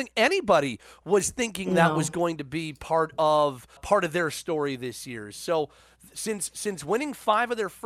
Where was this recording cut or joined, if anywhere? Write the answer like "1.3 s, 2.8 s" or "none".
3.8 s